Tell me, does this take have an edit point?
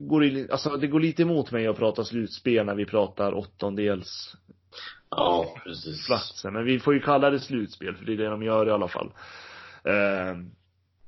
no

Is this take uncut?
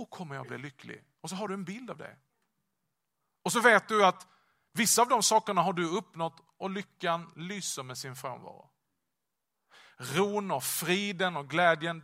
yes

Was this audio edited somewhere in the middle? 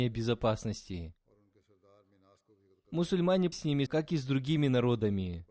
yes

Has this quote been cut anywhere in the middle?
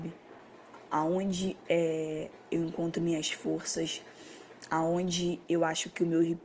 no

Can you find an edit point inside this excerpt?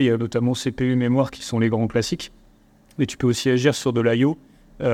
no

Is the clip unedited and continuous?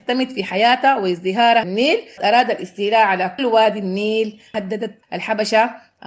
no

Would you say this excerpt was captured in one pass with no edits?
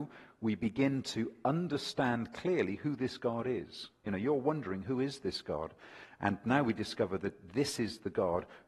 yes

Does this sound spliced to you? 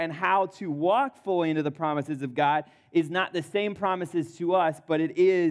no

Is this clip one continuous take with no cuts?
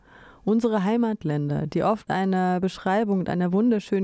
no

